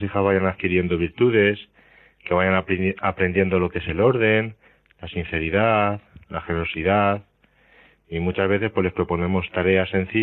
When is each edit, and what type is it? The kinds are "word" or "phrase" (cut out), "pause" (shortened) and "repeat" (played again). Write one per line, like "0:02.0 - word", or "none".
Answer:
none